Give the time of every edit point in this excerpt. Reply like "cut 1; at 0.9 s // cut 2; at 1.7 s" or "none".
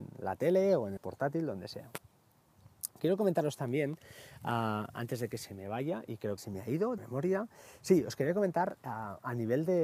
cut 1; at 1.0 s // cut 2; at 6.4 s // cut 3; at 7.0 s